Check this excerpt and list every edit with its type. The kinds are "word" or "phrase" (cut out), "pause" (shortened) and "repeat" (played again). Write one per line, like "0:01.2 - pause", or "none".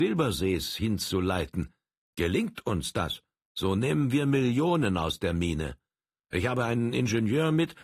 none